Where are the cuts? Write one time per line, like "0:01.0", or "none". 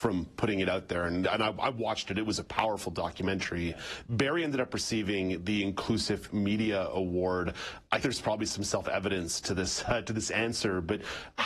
0:01.2
0:02.4
0:08.0